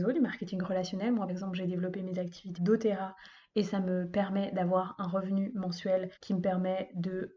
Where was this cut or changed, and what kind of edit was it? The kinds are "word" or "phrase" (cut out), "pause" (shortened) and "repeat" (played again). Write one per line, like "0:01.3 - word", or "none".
0:01.3 - word
0:02.6 - word
0:06.2 - pause